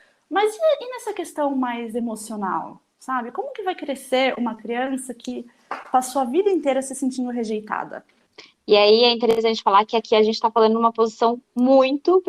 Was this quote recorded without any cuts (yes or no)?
yes